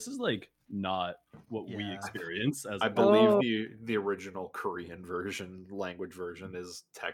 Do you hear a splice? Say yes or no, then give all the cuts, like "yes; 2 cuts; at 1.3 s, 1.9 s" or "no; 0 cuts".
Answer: no; 0 cuts